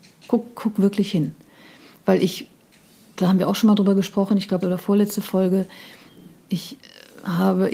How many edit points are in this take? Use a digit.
1